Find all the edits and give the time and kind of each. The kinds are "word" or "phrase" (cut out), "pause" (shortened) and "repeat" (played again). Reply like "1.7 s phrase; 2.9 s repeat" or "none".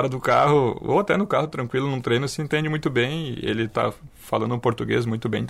none